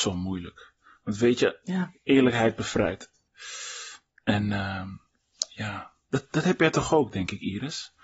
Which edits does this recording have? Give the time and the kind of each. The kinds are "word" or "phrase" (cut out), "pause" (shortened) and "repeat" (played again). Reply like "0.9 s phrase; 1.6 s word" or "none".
none